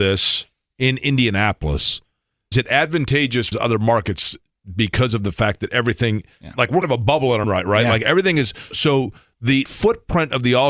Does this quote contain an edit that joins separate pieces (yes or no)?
yes